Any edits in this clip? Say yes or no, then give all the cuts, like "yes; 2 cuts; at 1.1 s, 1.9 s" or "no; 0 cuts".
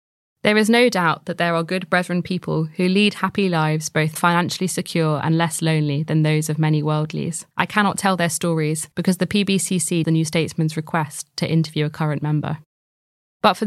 yes; 4 cuts; at 4.2 s, 7.5 s, 8.9 s, 10.0 s